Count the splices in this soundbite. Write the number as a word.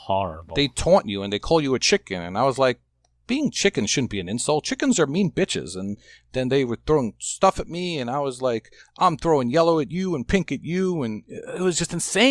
zero